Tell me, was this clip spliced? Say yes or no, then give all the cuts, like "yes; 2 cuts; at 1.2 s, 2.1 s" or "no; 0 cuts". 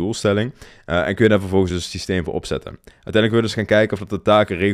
no; 0 cuts